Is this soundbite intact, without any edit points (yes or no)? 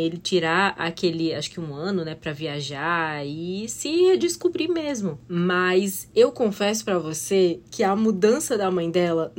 yes